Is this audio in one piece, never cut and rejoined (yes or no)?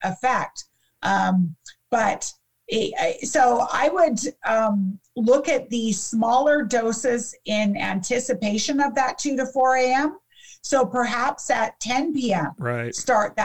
yes